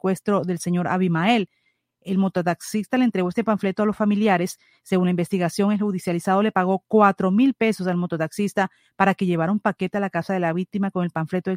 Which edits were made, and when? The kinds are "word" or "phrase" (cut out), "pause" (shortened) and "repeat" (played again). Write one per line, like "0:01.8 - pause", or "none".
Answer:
none